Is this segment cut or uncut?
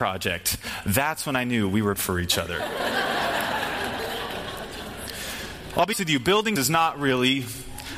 cut